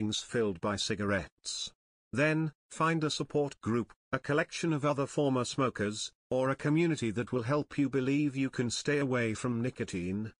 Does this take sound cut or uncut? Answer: uncut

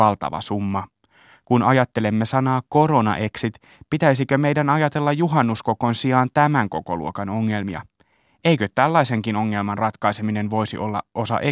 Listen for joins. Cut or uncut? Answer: uncut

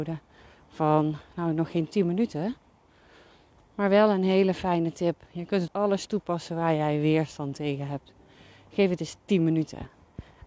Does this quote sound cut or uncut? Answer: cut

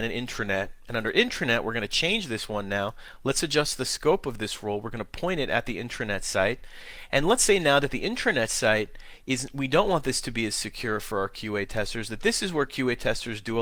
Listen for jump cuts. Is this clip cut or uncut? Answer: uncut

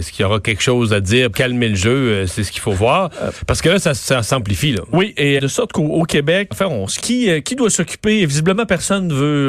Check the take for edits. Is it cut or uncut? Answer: cut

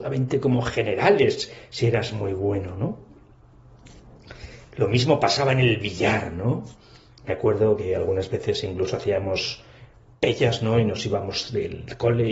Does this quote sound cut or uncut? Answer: uncut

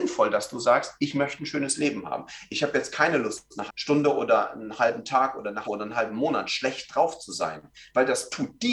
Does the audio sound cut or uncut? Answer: cut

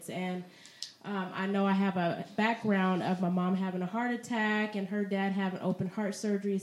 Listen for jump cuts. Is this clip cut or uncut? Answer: uncut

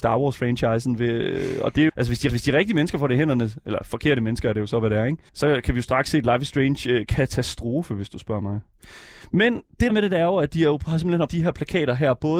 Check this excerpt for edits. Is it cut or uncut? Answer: cut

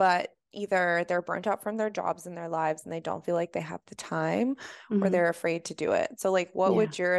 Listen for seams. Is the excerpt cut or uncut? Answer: uncut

